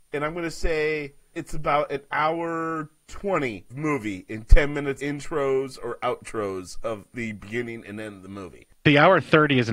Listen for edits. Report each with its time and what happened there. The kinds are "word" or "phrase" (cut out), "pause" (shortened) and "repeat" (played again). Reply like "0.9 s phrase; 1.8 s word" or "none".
1.4 s word; 3.7 s word; 5.0 s word